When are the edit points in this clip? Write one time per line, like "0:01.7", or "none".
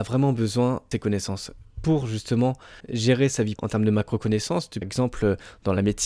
0:00.9
0:01.7
0:02.8
0:03.6
0:04.8